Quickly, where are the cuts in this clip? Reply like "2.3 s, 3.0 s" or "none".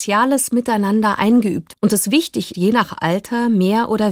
1.7 s, 2.5 s